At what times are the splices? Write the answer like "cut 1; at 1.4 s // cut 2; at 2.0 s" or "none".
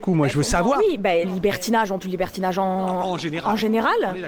cut 1; at 1.2 s // cut 2; at 2.0 s